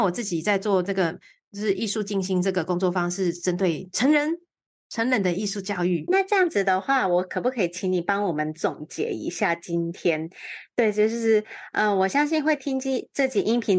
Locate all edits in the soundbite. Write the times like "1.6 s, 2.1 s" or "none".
6.1 s